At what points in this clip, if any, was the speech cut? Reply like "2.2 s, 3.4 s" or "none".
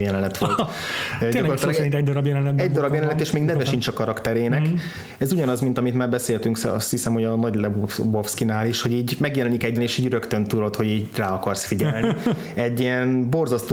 9.8 s

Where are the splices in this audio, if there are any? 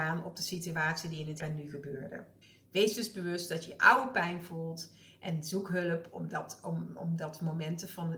1.4 s, 2.4 s

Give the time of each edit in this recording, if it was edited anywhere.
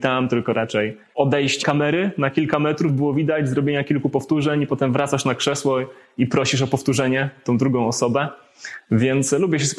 1.6 s, 2.9 s

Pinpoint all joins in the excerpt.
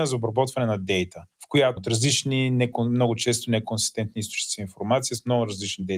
1.8 s

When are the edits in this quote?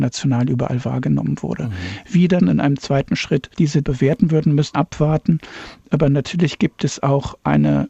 2.4 s, 3.8 s, 4.7 s

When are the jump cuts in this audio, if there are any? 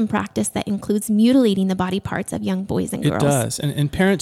none

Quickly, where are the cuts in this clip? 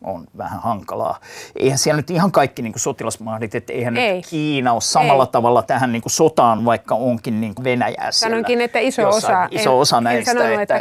6.6 s, 7.6 s

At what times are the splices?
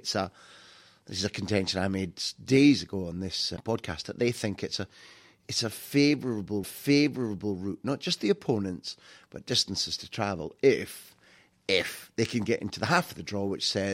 6.6 s

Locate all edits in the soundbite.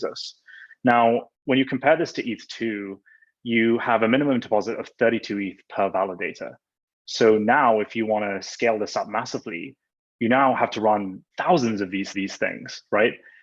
1.3 s, 11.3 s, 12.1 s

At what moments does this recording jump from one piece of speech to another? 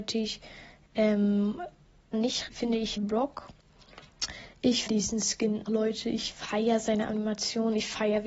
2.1 s, 2.5 s, 3.0 s, 4.9 s, 5.7 s

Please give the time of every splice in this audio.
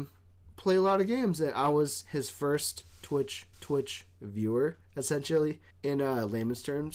3.5 s, 5.7 s

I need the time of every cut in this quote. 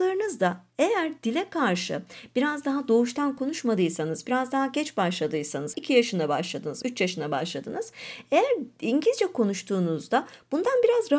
5.7 s, 6.8 s

